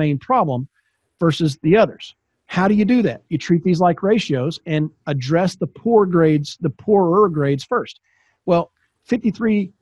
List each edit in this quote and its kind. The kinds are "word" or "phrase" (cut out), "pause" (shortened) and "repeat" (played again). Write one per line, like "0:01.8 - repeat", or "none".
none